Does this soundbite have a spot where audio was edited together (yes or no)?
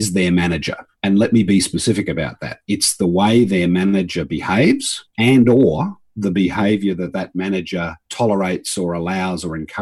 yes